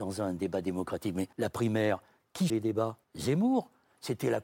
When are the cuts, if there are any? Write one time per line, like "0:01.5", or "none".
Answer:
0:01.3
0:02.5
0:03.0